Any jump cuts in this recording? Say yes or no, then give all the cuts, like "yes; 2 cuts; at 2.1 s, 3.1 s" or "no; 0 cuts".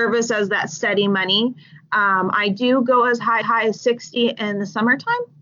yes; 1 cut; at 3.4 s